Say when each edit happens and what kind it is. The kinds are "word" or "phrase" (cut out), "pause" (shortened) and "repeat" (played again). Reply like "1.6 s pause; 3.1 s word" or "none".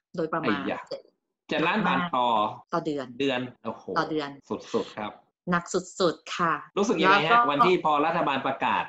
2.6 s pause; 3.6 s pause; 4.4 s pause; 5.3 s pause; 6.7 s pause